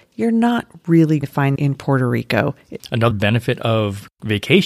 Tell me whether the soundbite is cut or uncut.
cut